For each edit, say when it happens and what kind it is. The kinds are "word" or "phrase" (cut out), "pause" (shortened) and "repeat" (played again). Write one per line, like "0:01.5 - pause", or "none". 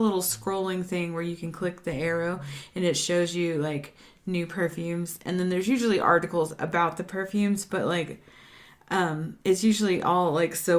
none

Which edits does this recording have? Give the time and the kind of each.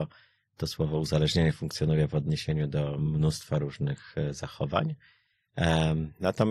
none

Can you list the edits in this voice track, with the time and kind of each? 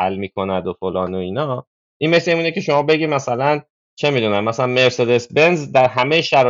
none

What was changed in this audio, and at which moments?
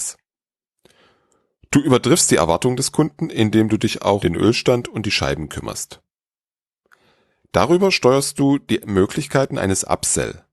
0:04.2 - word

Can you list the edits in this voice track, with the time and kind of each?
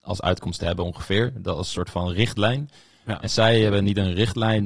none

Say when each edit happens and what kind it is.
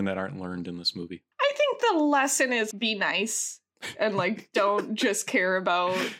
0:01.3 - pause
0:02.7 - word

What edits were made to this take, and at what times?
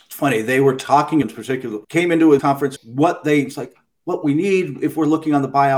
0:01.2 - phrase
0:01.8 - pause
0:02.4 - word
0:02.8 - phrase

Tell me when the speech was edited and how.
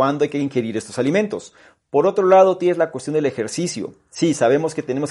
none

